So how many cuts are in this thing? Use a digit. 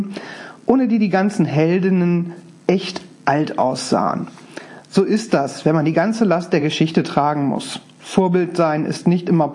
0